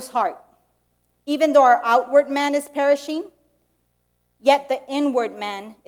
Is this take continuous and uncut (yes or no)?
yes